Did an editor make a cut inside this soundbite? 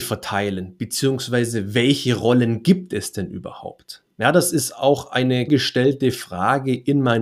yes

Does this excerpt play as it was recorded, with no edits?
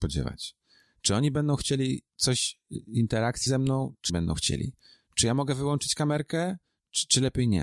no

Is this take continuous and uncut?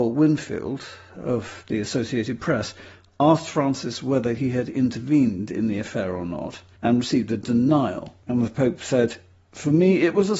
yes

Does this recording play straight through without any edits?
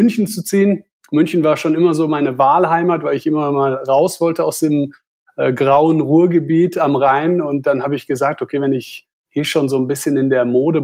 yes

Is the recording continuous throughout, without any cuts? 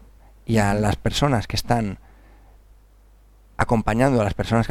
yes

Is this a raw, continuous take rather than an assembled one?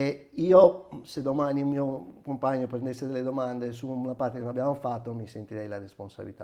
yes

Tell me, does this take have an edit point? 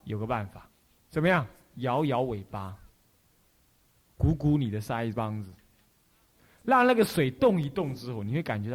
no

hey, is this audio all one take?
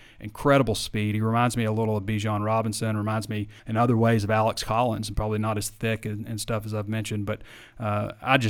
no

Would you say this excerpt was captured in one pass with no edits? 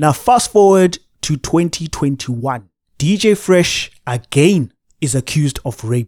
yes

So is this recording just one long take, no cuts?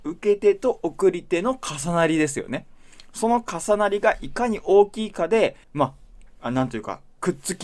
no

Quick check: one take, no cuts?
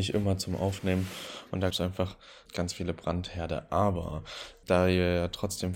no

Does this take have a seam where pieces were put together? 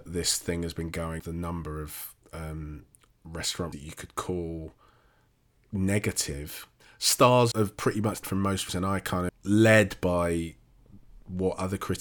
yes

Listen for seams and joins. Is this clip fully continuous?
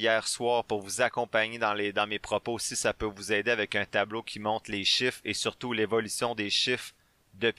yes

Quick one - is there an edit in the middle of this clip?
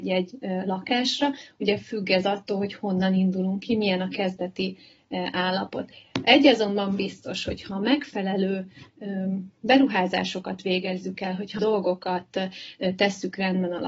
yes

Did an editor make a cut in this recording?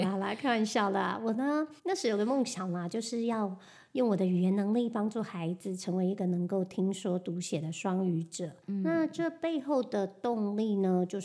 yes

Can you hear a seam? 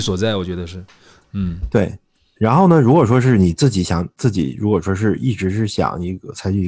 yes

